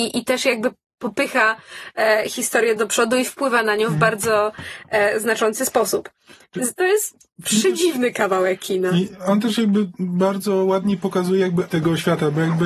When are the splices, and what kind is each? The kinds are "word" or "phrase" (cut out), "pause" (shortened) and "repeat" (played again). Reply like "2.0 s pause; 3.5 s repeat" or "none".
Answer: 2.8 s word; 11.7 s word